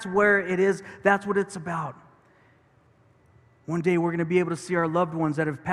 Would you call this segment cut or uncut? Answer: uncut